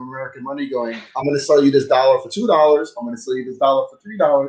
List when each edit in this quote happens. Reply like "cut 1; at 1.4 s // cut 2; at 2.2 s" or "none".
none